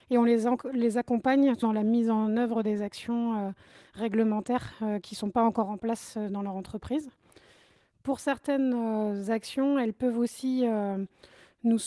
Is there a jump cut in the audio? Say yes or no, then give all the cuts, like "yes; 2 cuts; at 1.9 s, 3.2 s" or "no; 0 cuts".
yes; 1 cut; at 1.6 s